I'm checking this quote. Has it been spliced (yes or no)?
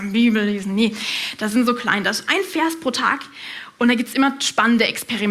no